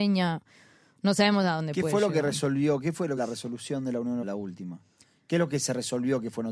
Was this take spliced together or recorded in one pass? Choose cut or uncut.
cut